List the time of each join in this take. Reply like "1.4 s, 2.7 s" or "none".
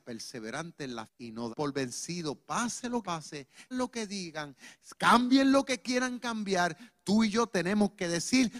1.1 s, 1.5 s, 3.0 s, 3.7 s